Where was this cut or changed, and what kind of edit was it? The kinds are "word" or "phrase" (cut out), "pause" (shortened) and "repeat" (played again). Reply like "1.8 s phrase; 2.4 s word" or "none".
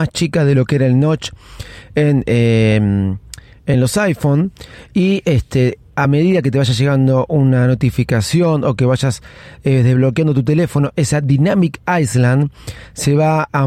none